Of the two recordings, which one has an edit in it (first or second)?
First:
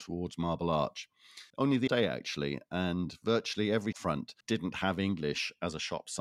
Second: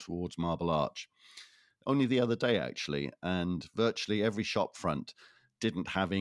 first